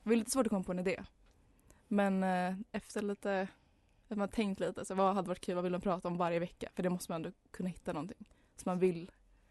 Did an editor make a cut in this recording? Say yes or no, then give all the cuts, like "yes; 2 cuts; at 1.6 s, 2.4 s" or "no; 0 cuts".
no; 0 cuts